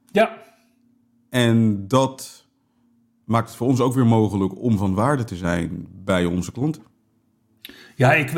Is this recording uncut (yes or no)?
yes